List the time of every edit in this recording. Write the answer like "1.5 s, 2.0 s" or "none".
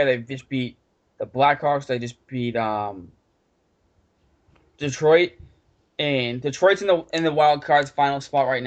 none